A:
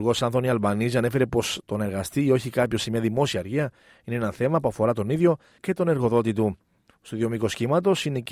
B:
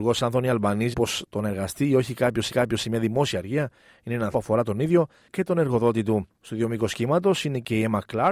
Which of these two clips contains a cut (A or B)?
B